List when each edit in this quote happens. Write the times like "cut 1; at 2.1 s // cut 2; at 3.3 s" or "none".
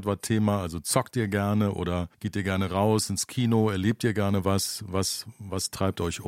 cut 1; at 2.1 s